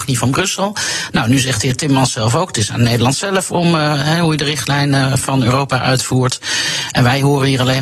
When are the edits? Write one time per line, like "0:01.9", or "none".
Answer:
none